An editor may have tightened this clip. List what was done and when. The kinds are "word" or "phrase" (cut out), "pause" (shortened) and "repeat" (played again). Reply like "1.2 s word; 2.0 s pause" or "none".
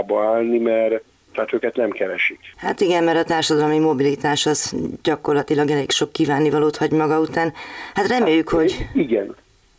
1.1 s pause